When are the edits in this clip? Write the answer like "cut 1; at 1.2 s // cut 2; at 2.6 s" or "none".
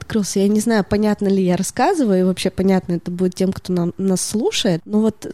none